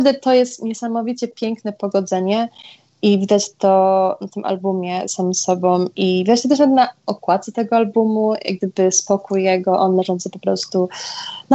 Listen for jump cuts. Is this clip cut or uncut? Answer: uncut